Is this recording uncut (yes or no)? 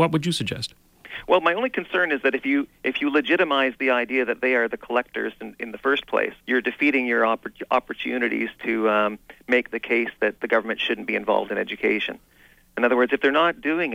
no